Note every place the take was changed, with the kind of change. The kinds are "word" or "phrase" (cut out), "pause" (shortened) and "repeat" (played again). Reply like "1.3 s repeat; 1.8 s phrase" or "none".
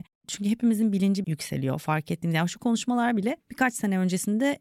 1.2 s phrase; 2.6 s word; 3.4 s pause